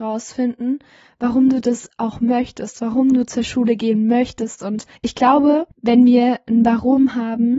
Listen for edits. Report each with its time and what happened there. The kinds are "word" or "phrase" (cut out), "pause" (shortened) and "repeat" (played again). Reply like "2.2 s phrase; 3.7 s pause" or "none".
4.9 s pause; 5.7 s pause